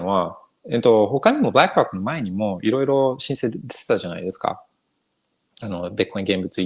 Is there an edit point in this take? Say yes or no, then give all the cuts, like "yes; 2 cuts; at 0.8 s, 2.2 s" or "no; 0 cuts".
no; 0 cuts